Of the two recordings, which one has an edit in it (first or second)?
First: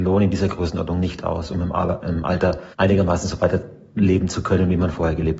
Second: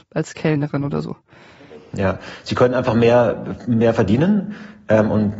first